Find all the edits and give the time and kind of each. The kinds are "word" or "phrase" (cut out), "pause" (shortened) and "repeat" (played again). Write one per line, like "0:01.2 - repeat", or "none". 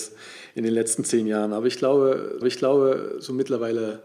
0:02.4 - repeat